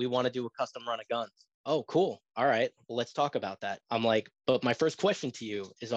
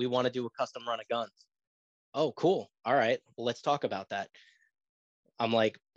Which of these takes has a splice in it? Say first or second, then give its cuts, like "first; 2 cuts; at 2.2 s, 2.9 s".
first; 2 cuts; at 1.5 s, 3.8 s